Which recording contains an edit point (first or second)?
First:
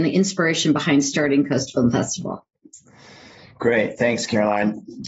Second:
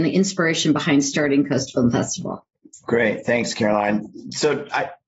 second